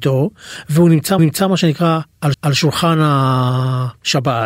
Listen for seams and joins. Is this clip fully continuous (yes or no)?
no